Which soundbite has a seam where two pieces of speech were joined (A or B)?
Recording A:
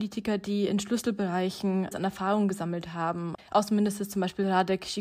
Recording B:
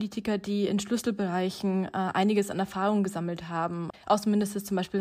A